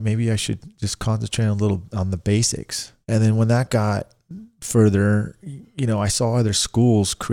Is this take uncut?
no; 1 cut; at 3.0 s

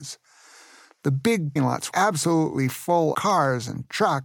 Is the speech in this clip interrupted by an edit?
yes; 3 cuts; at 1.6 s, 1.9 s, 3.1 s

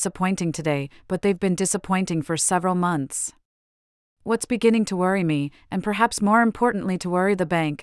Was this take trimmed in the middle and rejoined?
no; 0 cuts

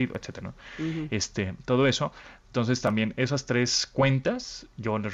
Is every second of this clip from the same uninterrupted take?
yes; 0 cuts

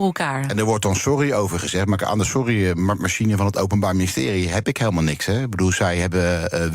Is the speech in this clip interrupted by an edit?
no; 0 cuts

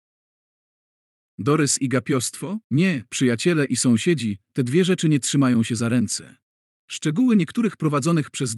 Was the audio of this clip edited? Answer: yes; 2 cuts; at 2.6 s, 6.6 s

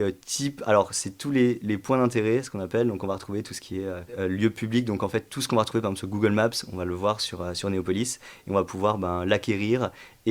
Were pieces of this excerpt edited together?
no; 0 cuts

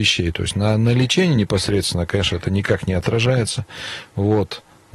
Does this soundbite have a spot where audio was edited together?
no; 0 cuts

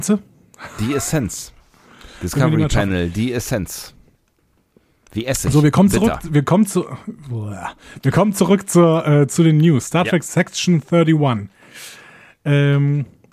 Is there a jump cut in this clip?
no; 0 cuts

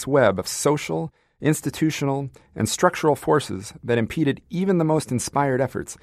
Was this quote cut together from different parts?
no; 0 cuts

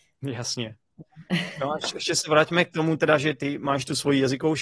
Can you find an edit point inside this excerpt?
no; 0 cuts

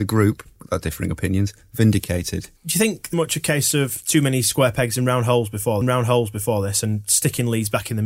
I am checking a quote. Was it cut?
yes; 2 cuts; at 3.1 s, 5.8 s

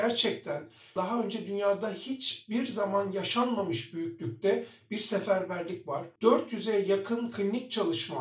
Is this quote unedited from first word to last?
yes; 0 cuts

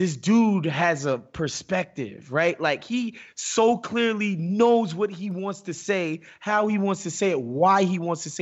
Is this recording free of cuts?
yes; 0 cuts

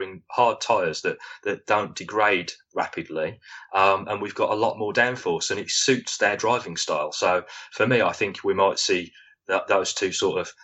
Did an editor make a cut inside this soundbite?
no; 0 cuts

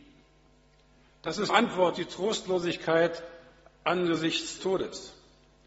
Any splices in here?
yes; 3 cuts; at 1.5 s, 1.9 s, 4.6 s

